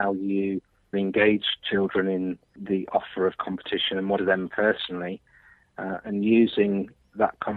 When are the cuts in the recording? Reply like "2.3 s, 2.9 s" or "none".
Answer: 0.9 s, 4.2 s